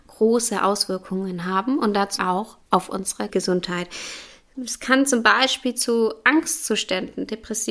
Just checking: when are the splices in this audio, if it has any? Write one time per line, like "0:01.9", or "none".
0:02.2
0:03.3